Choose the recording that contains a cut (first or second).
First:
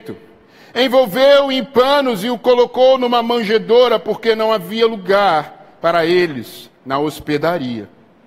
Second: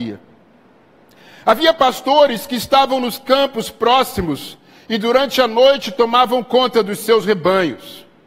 first